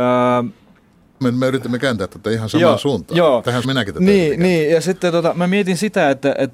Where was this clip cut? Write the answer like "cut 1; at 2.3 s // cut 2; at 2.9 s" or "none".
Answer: cut 1; at 1.2 s // cut 2; at 3.6 s